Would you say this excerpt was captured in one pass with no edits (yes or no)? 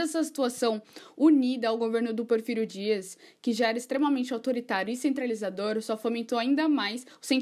yes